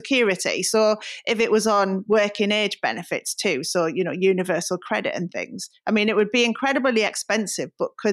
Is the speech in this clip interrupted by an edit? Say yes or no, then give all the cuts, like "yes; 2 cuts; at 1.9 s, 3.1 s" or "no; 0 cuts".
no; 0 cuts